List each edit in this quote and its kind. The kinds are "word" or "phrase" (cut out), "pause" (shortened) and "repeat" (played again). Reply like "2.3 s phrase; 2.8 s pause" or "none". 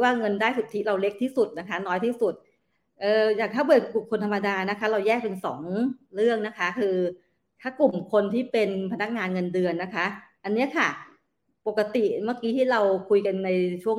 none